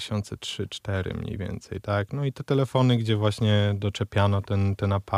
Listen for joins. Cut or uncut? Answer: uncut